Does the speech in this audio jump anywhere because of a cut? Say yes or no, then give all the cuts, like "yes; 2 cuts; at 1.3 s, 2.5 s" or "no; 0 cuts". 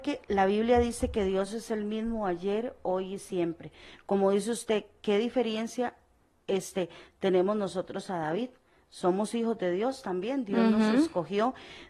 no; 0 cuts